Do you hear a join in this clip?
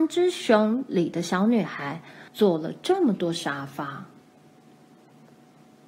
yes; 1 cut; at 2.3 s

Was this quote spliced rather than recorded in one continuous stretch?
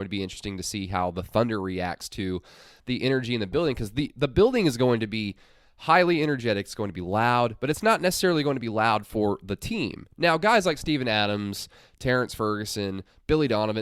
no; 0 cuts

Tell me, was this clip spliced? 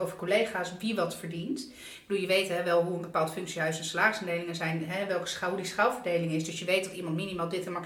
no; 0 cuts

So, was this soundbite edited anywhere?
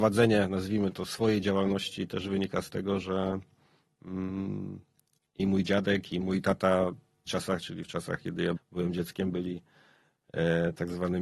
yes; 3 cuts; at 6.2 s, 7.3 s, 8.6 s

